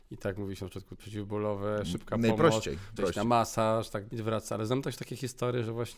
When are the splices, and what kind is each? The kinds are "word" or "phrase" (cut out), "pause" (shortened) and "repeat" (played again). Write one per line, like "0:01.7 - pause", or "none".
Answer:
0:01.0 - word
0:03.0 - word
0:04.1 - word